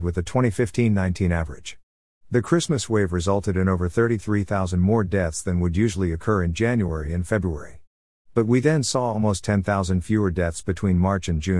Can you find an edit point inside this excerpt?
no; 0 cuts

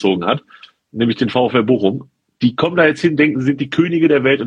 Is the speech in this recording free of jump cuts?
yes; 0 cuts

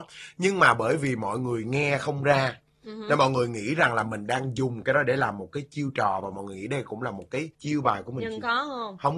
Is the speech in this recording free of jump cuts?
no; 1 cut; at 7.5 s

